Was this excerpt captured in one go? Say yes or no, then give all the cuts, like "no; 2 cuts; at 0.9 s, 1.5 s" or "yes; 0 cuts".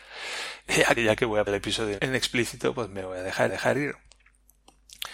no; 4 cuts; at 1.0 s, 1.5 s, 2.0 s, 3.5 s